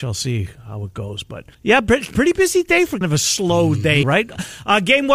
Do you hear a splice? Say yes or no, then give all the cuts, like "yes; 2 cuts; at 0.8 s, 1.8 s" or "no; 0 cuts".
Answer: yes; 3 cuts; at 1.5 s, 3.0 s, 4.0 s